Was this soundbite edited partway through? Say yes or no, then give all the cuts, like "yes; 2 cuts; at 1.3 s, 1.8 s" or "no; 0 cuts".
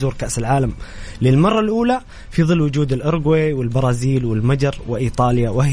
no; 0 cuts